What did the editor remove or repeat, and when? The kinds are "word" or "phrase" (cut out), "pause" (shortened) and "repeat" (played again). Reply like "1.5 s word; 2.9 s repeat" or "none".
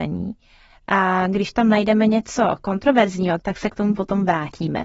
none